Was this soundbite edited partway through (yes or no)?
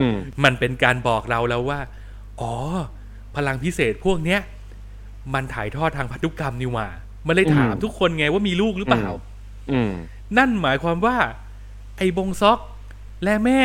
no